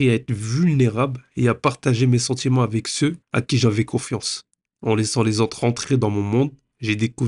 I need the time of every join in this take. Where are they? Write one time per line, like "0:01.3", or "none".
0:03.2
0:04.5